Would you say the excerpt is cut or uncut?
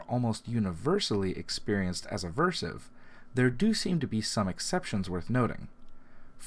uncut